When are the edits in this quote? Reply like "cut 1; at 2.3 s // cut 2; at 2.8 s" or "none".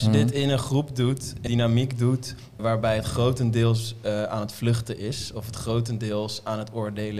cut 1; at 1.5 s // cut 2; at 2.6 s